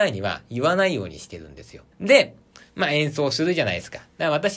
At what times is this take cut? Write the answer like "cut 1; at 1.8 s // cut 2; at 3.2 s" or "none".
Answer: cut 1; at 1.9 s